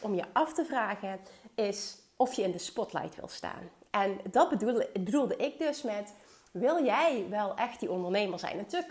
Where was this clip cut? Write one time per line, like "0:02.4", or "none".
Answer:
none